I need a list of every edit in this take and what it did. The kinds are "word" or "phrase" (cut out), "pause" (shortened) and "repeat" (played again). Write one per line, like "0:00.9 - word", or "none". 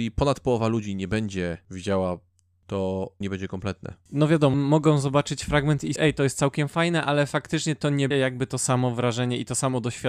0:02.6 - word
0:03.2 - word
0:04.5 - word
0:06.0 - word
0:08.1 - word